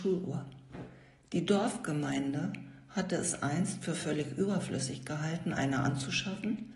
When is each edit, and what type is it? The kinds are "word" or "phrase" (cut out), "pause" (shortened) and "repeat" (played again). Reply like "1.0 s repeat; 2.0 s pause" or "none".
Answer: none